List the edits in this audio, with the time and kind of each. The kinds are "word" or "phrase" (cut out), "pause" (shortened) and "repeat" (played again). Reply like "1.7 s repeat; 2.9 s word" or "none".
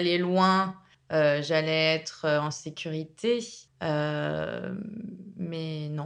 0.9 s pause; 3.7 s pause